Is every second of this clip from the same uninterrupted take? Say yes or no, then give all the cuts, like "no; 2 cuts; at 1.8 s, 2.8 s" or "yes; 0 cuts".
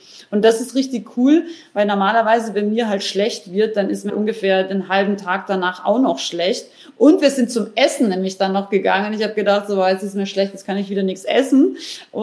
no; 1 cut; at 4.1 s